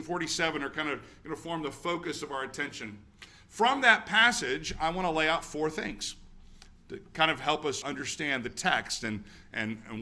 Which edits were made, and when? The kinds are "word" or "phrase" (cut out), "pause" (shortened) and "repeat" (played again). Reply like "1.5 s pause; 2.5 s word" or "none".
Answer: 7.8 s word

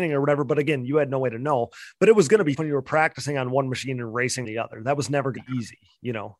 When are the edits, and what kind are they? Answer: 2.6 s word; 4.4 s word; 5.4 s word

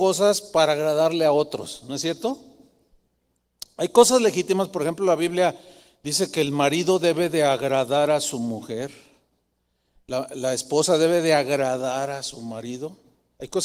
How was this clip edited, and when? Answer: none

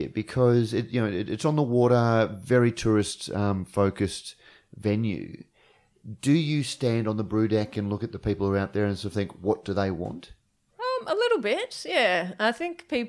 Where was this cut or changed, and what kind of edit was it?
none

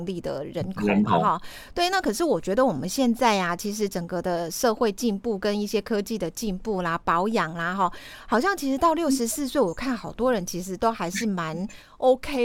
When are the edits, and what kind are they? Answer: none

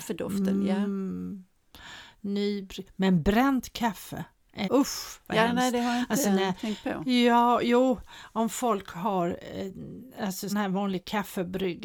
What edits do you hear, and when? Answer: 4.6 s word; 10.5 s word

